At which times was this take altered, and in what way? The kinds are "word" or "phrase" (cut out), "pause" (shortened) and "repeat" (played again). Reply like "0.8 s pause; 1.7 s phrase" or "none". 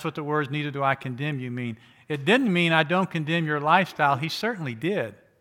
none